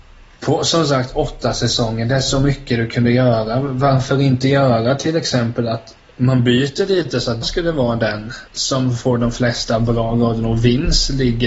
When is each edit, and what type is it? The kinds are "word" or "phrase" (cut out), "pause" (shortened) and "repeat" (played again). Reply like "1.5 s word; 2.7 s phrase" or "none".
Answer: 7.4 s word